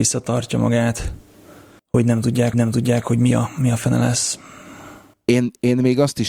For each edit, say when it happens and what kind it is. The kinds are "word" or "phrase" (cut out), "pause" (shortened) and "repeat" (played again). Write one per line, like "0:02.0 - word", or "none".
0:02.5 - repeat